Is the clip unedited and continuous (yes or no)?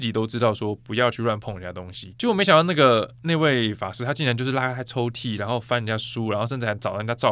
yes